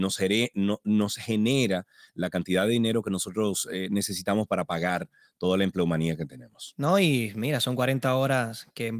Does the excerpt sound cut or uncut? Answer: uncut